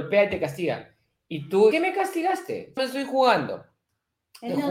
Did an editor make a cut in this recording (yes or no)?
yes